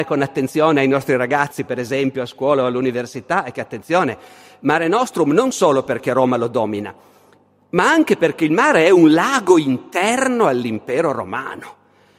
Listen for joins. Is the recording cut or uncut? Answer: uncut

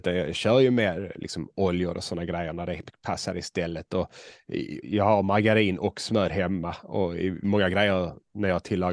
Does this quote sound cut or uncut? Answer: cut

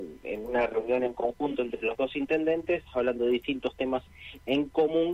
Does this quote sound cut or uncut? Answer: uncut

